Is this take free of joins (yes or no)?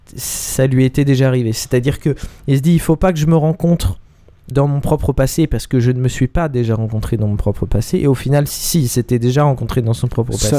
no